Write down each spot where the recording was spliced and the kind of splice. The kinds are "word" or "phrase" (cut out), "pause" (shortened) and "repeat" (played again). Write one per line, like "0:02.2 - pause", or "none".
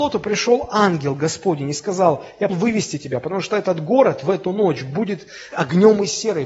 0:02.5 - word
0:05.5 - word